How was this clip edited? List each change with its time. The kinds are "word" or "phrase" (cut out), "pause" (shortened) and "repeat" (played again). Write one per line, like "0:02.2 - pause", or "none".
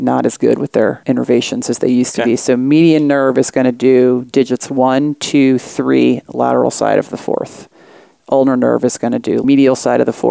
none